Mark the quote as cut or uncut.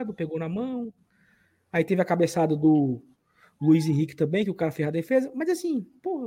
uncut